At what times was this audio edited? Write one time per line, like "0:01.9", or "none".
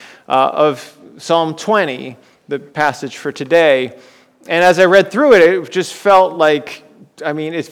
none